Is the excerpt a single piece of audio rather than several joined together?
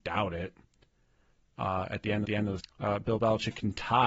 no; 2 cuts; at 2.2 s, 2.6 s

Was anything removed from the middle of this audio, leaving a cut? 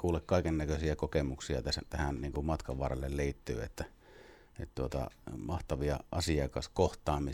no; 0 cuts

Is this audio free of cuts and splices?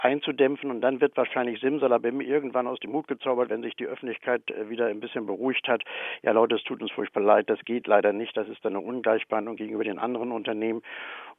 yes; 0 cuts

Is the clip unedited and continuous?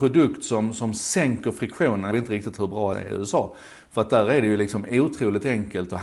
no; 2 cuts; at 2.1 s, 2.9 s

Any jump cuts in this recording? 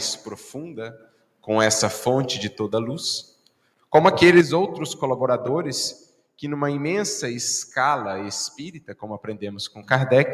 no; 0 cuts

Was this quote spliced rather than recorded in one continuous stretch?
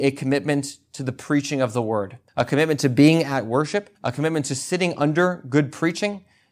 yes; 2 cuts; at 2.3 s, 3.9 s

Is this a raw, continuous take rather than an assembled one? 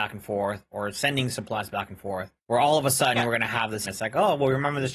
no; 2 cuts; at 2.4 s, 3.8 s

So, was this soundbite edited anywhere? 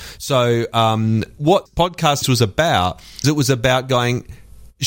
yes; 3 cuts; at 1.7 s, 2.2 s, 3.2 s

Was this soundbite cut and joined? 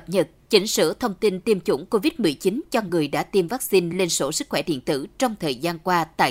no; 0 cuts

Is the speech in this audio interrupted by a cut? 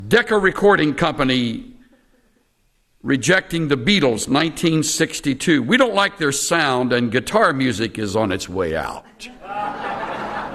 no; 0 cuts

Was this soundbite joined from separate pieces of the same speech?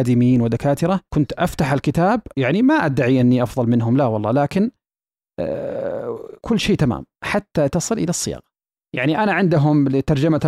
yes; 4 cuts; at 1.1 s, 2.3 s, 6.4 s, 7.1 s

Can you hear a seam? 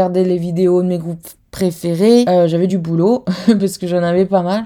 no; 0 cuts

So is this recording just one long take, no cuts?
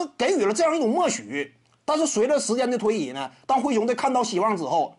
yes; 0 cuts

